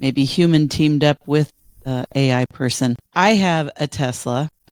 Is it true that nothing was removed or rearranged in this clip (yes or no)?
no